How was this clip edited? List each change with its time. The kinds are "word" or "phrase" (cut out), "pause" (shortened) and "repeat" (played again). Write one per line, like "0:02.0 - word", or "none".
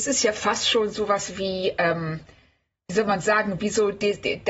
none